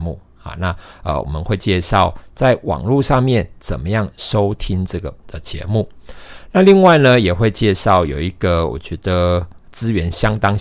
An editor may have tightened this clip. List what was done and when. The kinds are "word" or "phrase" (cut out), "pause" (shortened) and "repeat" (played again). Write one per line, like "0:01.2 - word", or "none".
0:05.2 - word
0:09.6 - pause